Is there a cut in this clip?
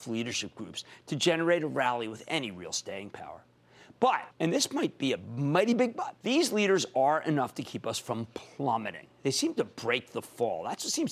yes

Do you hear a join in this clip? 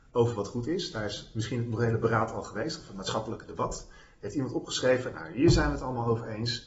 no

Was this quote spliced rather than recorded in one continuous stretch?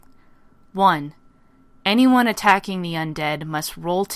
no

